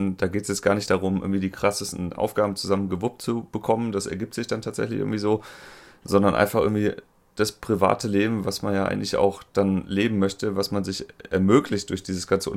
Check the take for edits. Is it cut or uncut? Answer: uncut